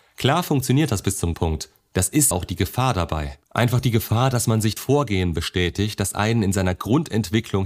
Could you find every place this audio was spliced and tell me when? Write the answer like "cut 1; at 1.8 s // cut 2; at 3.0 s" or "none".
cut 1; at 1.3 s // cut 2; at 2.3 s // cut 3; at 3.5 s // cut 4; at 4.8 s